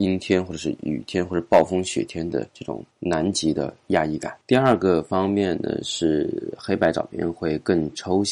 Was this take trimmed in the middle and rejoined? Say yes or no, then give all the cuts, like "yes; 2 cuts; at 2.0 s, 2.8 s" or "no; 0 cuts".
yes; 3 cuts; at 2.5 s, 2.9 s, 4.4 s